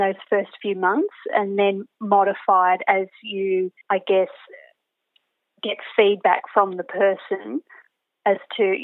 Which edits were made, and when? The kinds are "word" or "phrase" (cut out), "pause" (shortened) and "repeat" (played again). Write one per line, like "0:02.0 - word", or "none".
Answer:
0:03.8 - pause